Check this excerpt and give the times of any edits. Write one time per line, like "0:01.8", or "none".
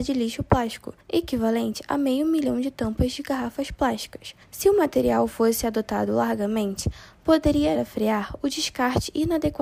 0:01.0
0:04.4
0:07.7